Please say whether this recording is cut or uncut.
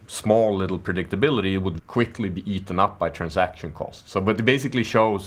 cut